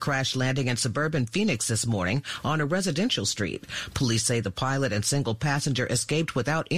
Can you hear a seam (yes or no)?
no